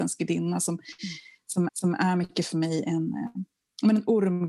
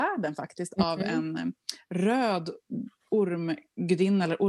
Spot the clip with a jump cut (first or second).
first